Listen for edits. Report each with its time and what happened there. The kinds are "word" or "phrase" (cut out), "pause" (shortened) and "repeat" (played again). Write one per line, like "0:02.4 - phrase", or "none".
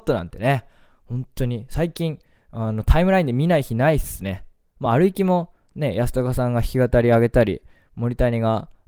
none